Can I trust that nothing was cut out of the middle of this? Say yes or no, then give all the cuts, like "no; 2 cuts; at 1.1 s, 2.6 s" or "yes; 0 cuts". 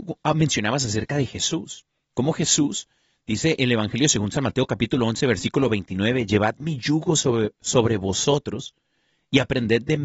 yes; 0 cuts